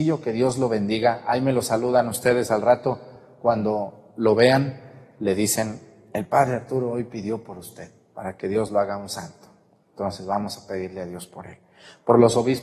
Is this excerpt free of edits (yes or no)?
yes